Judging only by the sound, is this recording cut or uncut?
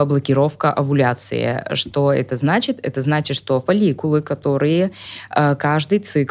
uncut